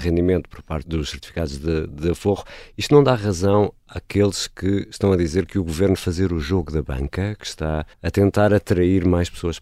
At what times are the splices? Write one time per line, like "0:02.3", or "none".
0:06.0
0:07.9